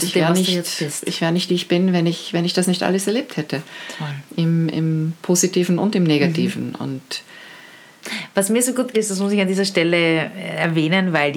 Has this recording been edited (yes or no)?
yes